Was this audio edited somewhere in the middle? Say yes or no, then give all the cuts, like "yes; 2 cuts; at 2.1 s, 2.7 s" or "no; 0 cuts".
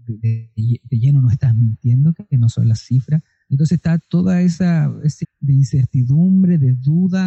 yes; 1 cut; at 5.2 s